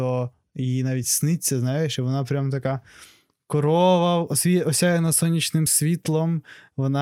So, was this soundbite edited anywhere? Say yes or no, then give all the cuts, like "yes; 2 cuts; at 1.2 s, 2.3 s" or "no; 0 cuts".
no; 0 cuts